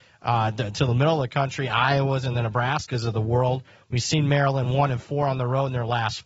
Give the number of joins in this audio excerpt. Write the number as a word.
zero